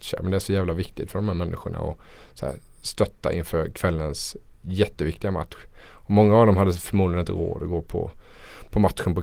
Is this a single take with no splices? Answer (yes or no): yes